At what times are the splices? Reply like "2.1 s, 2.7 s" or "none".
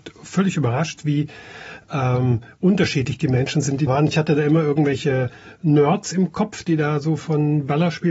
3.9 s